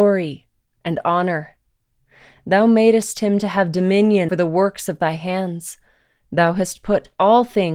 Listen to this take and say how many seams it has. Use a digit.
1